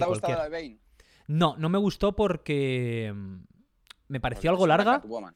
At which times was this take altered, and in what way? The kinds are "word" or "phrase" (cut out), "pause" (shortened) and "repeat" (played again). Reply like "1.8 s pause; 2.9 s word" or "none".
none